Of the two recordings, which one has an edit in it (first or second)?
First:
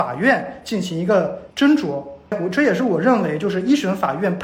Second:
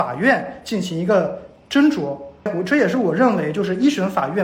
first